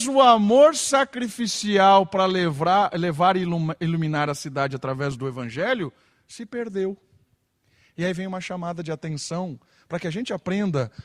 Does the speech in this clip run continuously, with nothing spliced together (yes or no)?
yes